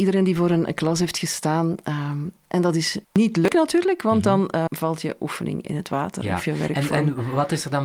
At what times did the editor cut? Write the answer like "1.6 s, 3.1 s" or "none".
3.0 s, 4.7 s